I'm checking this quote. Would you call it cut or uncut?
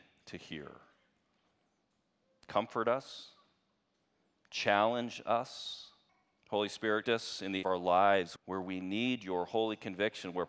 cut